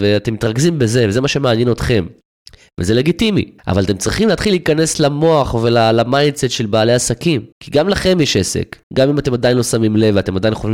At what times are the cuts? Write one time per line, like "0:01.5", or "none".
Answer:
0:03.6
0:07.5
0:08.8